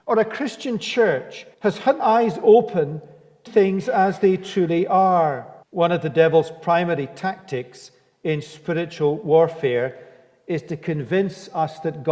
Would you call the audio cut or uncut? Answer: cut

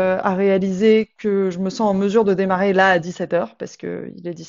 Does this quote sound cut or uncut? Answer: uncut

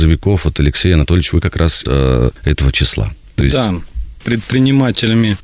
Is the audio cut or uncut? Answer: cut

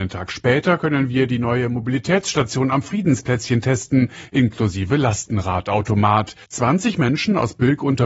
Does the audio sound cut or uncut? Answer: cut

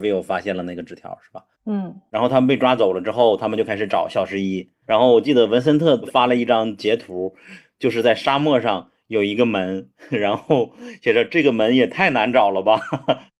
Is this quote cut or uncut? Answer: cut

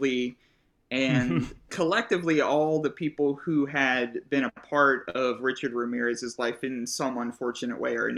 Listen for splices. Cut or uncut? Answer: cut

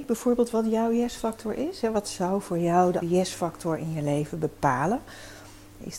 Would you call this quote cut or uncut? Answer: cut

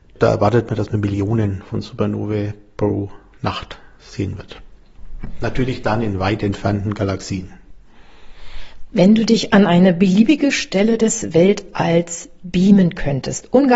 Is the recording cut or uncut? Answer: uncut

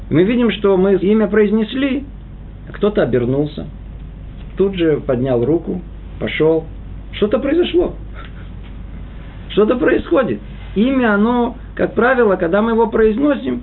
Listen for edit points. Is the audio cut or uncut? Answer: cut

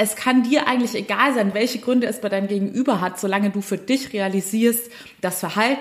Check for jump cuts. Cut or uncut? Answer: uncut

